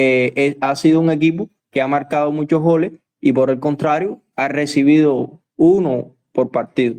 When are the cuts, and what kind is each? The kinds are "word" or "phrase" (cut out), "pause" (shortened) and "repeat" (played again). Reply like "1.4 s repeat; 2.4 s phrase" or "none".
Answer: none